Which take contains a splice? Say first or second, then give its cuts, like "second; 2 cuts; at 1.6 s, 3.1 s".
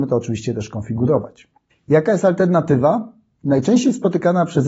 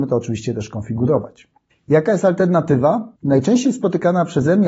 second; 1 cut; at 3.2 s